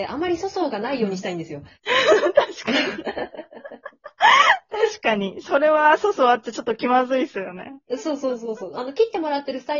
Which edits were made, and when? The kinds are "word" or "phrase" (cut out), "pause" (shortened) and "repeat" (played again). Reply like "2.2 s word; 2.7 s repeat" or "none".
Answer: 1.7 s pause